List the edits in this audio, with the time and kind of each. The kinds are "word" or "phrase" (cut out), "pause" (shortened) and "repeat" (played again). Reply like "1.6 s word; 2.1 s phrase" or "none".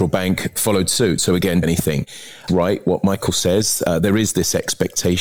1.6 s phrase; 2.5 s phrase